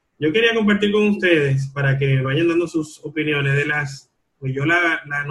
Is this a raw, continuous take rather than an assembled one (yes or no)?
no